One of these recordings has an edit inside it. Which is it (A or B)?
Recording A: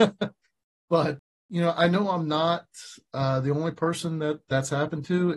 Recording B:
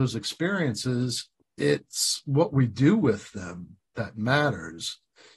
B